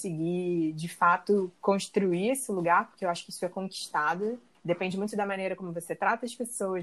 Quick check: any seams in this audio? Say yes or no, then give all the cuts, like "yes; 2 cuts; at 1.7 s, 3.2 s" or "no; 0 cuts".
no; 0 cuts